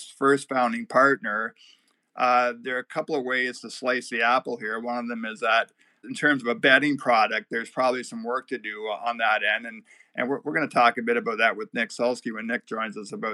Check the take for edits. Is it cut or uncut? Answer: uncut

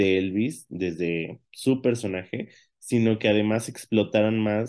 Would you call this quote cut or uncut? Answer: uncut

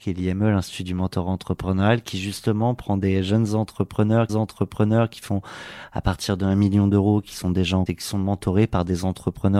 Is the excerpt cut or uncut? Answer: cut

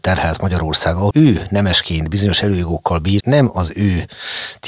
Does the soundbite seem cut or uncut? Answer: cut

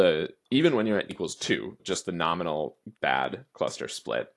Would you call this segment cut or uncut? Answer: cut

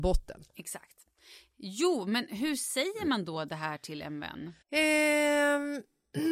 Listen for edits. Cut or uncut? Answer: cut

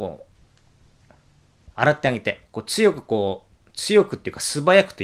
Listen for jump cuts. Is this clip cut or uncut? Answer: cut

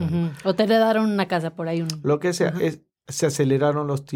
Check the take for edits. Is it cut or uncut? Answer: uncut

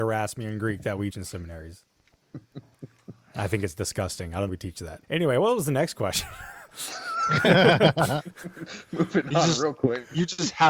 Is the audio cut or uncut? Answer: cut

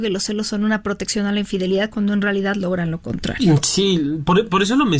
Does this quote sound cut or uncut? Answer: uncut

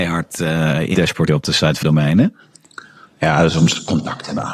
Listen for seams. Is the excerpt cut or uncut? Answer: cut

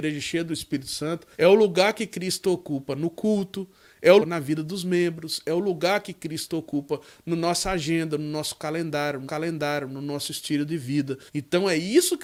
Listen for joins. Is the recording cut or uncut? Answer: cut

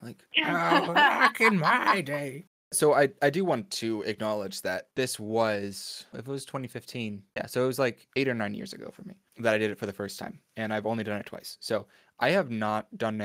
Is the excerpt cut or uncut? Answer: uncut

